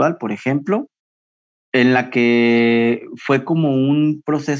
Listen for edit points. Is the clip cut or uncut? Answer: uncut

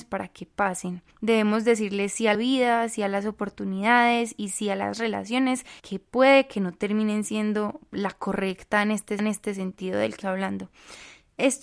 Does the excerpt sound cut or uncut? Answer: cut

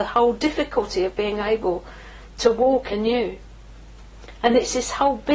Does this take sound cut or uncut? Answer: cut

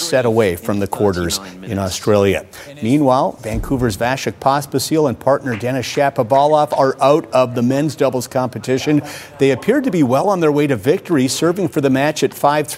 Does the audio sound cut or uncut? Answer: uncut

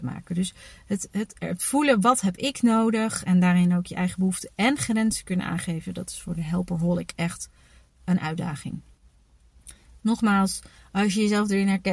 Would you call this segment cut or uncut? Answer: uncut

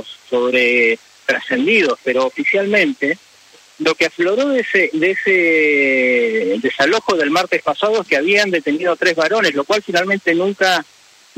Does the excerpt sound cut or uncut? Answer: uncut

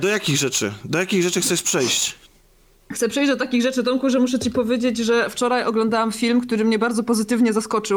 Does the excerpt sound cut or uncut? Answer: uncut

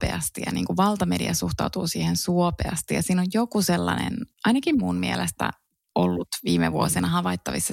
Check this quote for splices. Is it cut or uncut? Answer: cut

